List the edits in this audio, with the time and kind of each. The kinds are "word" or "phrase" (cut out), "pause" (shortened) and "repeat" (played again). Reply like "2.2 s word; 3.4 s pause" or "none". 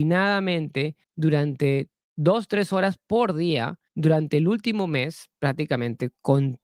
1.0 s pause; 3.9 s pause